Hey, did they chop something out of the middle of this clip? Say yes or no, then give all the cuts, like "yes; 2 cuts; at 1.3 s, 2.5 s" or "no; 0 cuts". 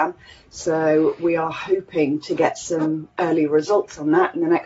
no; 0 cuts